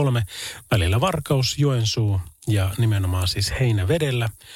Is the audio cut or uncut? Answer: uncut